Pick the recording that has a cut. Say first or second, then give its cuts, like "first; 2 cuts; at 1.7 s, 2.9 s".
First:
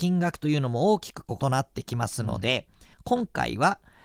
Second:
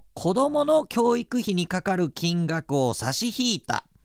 first; 1 cut; at 2.9 s